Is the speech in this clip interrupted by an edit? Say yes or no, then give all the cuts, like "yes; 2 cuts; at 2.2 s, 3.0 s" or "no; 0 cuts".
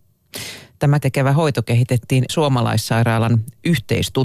yes; 2 cuts; at 1.0 s, 2.3 s